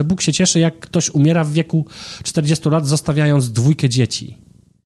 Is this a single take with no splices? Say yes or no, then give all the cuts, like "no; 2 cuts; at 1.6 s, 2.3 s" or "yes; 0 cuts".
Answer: yes; 0 cuts